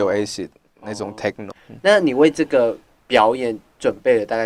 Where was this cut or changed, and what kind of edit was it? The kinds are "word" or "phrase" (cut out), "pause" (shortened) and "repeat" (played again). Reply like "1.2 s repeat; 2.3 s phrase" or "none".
1.5 s word